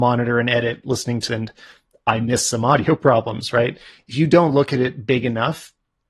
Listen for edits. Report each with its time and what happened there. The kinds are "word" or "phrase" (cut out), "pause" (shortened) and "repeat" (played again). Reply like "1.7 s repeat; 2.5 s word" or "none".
1.3 s phrase